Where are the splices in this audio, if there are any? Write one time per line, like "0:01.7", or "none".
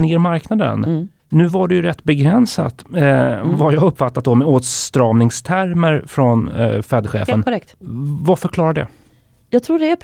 none